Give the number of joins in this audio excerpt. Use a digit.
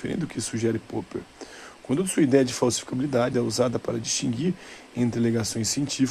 1